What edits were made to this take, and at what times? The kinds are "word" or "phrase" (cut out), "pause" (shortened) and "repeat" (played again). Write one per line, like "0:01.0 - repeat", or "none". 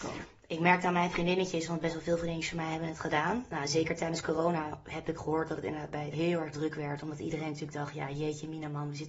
0:06.1 - word